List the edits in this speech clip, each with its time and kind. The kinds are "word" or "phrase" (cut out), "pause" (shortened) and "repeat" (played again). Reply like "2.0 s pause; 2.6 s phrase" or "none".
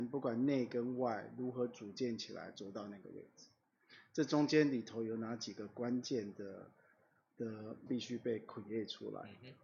7.9 s word